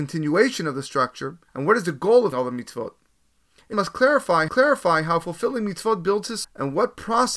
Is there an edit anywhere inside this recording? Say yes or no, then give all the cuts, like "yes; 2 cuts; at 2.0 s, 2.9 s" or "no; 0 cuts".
yes; 5 cuts; at 1.5 s, 2.3 s, 3.7 s, 4.5 s, 6.4 s